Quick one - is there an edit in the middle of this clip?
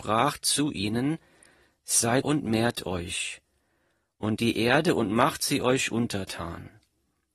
yes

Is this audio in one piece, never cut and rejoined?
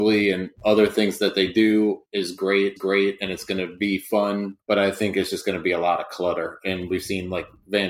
no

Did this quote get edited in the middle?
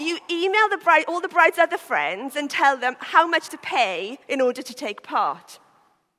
yes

